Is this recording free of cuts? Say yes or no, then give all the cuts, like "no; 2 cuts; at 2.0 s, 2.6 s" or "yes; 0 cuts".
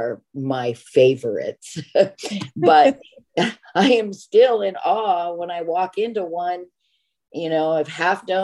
yes; 0 cuts